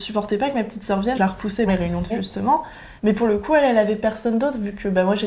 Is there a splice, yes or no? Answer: yes